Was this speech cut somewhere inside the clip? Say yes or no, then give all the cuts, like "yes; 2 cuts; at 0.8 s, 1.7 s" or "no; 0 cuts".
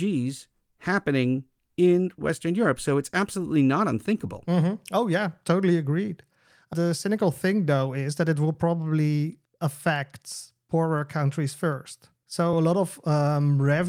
no; 0 cuts